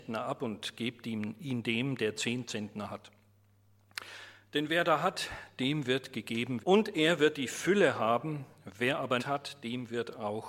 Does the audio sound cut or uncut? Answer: cut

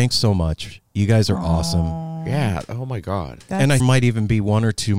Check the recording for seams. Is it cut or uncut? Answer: cut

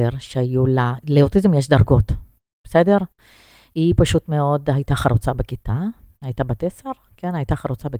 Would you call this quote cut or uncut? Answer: uncut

